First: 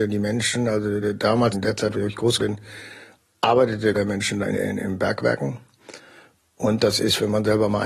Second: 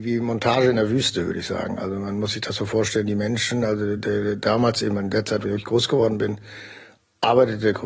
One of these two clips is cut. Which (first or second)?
first